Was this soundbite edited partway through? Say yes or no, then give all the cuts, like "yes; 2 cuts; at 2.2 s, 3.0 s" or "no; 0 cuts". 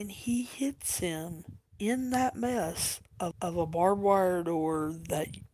yes; 2 cuts; at 1.7 s, 3.3 s